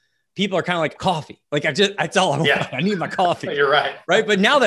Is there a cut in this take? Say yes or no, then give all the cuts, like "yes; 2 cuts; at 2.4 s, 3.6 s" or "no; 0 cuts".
yes; 2 cuts; at 1.0 s, 1.4 s